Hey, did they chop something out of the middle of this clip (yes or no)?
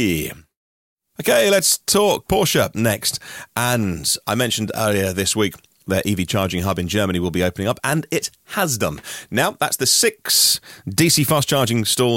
no